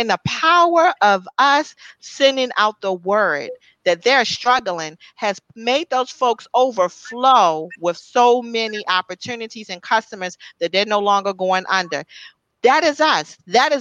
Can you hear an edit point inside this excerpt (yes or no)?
no